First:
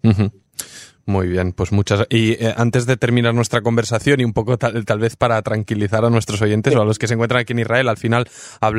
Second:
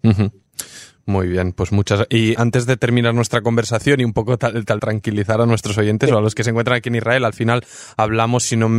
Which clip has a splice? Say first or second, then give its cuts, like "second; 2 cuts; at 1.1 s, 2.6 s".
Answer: second; 2 cuts; at 2.4 s, 4.8 s